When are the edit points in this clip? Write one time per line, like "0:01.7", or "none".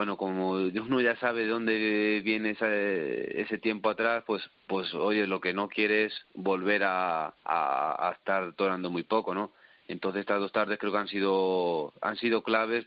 0:06.2
0:07.4